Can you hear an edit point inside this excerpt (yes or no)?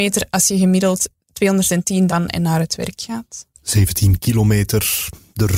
yes